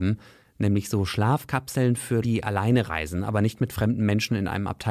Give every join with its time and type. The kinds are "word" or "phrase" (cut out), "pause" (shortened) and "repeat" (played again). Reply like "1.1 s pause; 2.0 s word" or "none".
2.2 s word

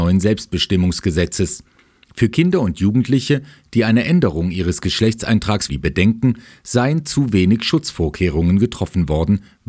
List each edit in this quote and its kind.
5.7 s phrase

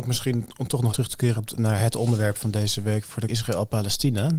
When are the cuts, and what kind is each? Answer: 0.9 s word; 1.4 s word; 3.3 s word

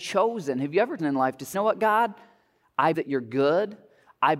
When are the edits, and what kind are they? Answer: 1.0 s word; 1.5 s word; 2.9 s word

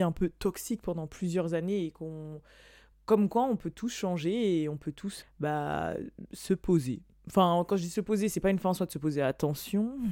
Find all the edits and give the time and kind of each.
5.2 s word

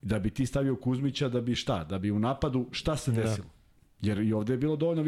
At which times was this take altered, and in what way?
none

